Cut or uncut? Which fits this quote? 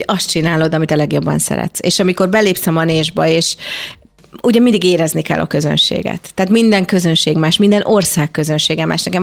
uncut